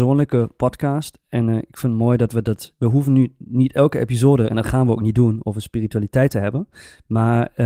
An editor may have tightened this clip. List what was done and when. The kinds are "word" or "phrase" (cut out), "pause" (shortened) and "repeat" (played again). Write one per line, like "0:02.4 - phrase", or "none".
none